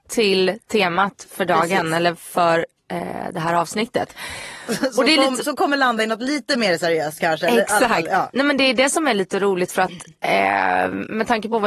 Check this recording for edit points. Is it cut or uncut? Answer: uncut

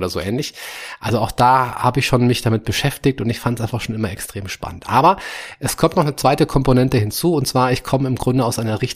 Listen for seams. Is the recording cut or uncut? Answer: uncut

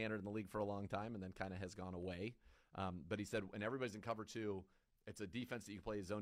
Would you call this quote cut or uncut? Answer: uncut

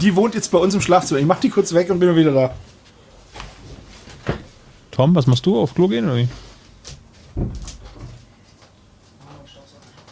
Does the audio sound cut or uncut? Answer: uncut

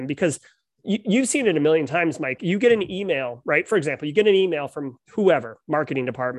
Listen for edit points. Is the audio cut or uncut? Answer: cut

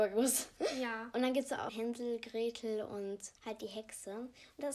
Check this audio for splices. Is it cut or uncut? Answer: cut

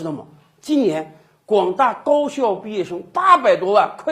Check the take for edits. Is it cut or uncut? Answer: uncut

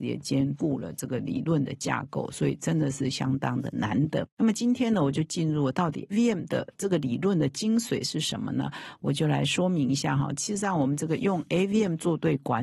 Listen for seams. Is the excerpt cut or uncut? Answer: cut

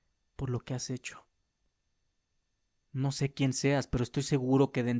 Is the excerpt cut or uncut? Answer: uncut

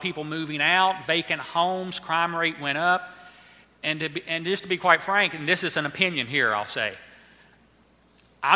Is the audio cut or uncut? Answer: uncut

